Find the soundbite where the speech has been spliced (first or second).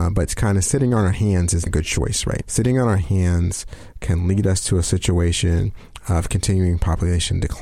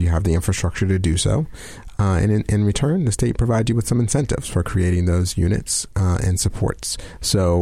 first